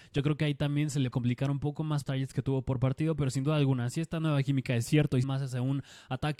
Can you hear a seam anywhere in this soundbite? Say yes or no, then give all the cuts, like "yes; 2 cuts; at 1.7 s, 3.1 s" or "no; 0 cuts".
yes; 3 cuts; at 1.1 s, 2.0 s, 5.2 s